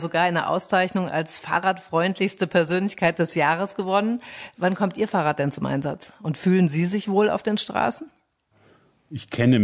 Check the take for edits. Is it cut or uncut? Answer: uncut